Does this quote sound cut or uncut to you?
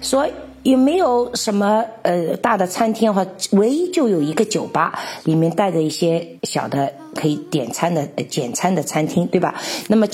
cut